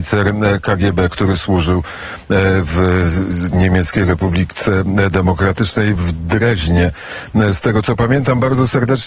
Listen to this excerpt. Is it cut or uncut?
uncut